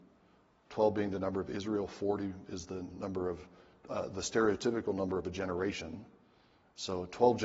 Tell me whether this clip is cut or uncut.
uncut